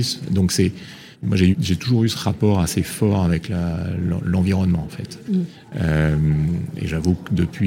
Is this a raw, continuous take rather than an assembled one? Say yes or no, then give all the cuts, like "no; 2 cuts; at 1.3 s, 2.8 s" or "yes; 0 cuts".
no; 2 cuts; at 1.1 s, 1.5 s